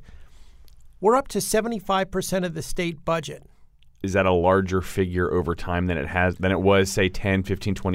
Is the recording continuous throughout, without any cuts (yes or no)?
yes